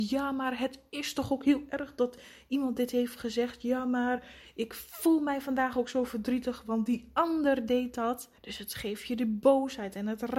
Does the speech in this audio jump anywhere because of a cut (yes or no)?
yes